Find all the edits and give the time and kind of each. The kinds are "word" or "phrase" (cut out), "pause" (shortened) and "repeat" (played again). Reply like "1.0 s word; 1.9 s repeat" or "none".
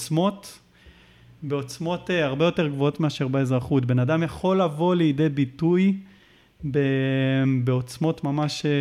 none